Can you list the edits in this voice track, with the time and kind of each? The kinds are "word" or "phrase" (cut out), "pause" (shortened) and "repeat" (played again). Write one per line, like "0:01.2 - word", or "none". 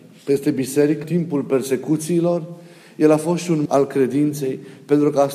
0:01.0 - word
0:03.7 - word